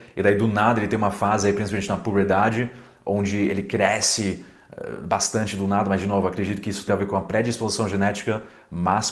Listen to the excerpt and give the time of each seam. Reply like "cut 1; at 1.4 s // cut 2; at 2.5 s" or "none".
cut 1; at 6.9 s